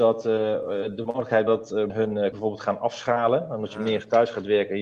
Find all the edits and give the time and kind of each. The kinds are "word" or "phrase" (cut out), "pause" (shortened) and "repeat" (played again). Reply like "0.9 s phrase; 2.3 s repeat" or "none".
1.5 s word; 1.9 s word; 2.3 s word